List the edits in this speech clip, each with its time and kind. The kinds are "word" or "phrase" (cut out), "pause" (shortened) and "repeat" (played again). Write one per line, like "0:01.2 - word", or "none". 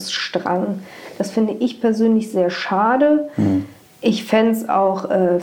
none

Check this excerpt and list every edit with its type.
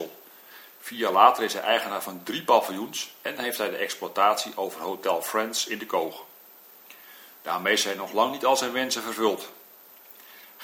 none

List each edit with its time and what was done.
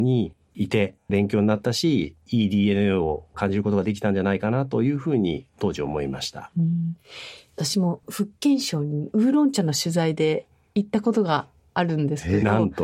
0:01.0 - pause

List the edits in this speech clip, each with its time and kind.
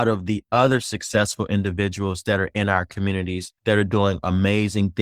0:03.6 - pause

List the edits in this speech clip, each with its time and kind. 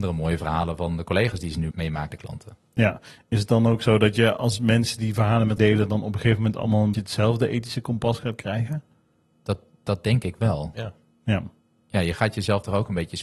0:01.7 - word
0:02.1 - word
0:05.6 - word
0:06.9 - word
0:09.2 - pause

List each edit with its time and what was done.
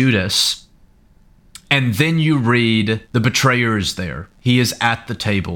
0:03.0 - pause
0:04.3 - pause

